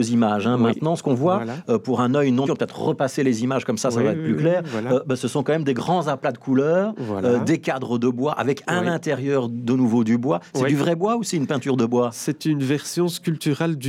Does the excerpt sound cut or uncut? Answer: cut